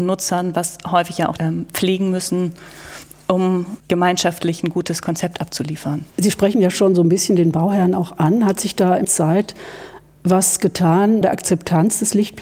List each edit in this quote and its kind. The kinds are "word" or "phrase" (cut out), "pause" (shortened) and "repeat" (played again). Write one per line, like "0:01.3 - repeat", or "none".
0:01.4 - phrase
0:03.8 - pause
0:06.1 - pause
0:09.0 - phrase
0:11.2 - word